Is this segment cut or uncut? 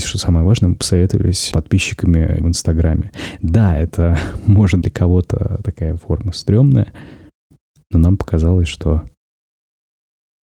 cut